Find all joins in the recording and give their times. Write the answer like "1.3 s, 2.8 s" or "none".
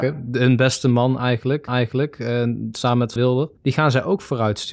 1.7 s, 3.2 s, 3.6 s